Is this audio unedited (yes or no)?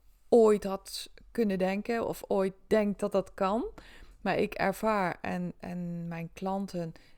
yes